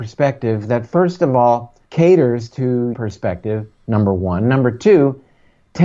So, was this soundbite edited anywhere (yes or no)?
yes